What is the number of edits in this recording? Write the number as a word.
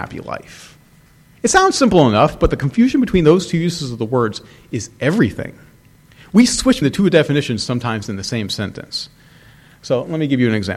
one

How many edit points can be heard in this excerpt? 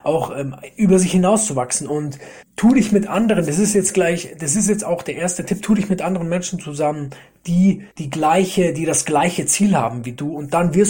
two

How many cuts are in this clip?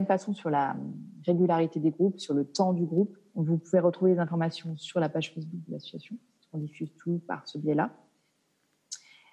zero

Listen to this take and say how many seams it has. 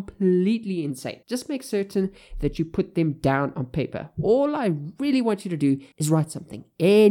two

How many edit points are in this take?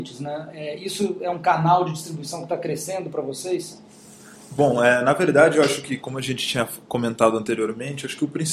one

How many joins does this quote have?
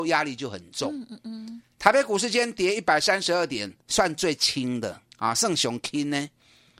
two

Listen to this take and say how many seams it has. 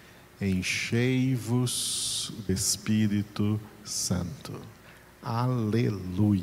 one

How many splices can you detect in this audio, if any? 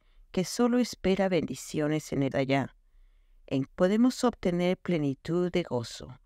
two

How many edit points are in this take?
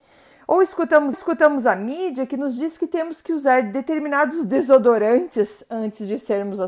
one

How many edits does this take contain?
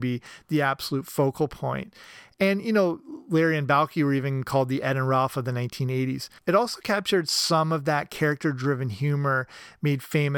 one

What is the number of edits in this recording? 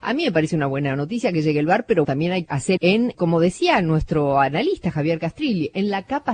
four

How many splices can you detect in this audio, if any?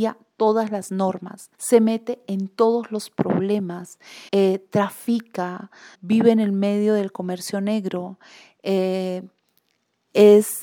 three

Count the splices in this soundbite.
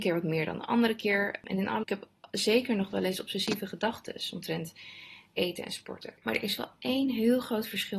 two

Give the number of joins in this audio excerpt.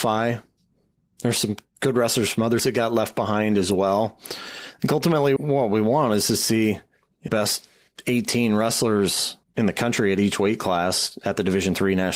four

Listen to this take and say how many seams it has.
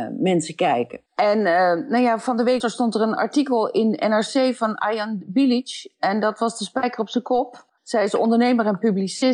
two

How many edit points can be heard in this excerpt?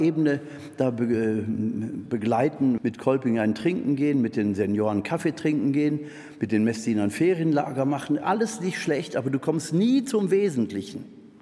one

